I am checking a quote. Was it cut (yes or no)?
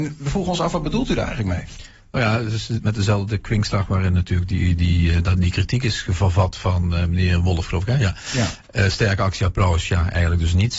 no